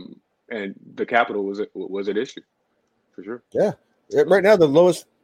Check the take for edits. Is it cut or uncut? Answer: uncut